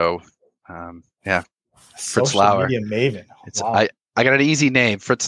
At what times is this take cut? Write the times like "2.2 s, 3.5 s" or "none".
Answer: none